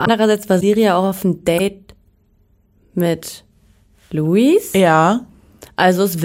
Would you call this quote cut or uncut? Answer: uncut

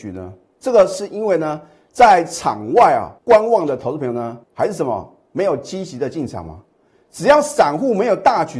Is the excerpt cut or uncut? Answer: cut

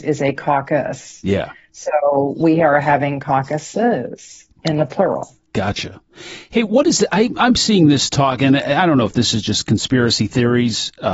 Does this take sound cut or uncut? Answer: uncut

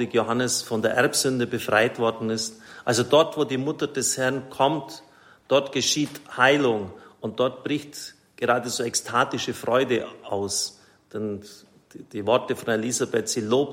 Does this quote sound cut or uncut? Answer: uncut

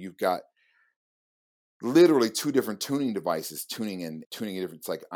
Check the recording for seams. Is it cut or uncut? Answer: cut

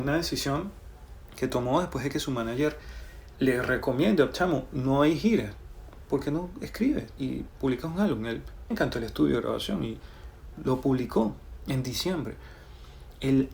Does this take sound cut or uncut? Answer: cut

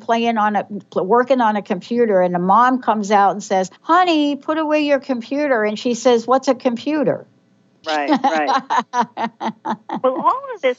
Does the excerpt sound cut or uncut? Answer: cut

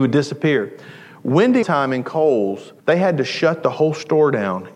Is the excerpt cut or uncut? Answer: cut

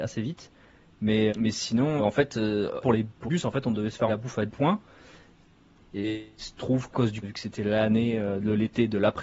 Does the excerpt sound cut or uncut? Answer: cut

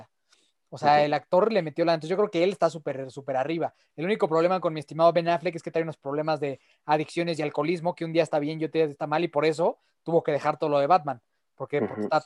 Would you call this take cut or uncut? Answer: uncut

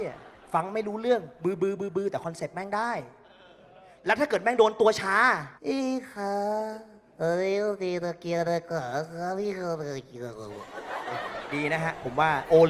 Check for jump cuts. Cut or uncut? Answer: cut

